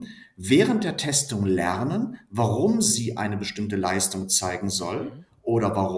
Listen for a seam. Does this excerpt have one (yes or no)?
no